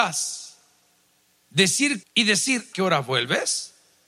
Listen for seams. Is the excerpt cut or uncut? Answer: cut